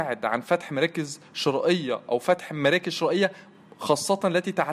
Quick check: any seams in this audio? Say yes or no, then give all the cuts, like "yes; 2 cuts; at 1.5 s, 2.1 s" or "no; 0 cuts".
no; 0 cuts